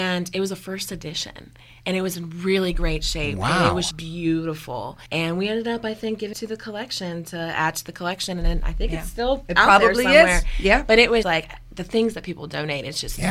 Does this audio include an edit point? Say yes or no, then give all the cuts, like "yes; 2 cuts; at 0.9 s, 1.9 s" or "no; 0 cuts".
yes; 4 cuts; at 3.9 s, 5.1 s, 6.3 s, 11.2 s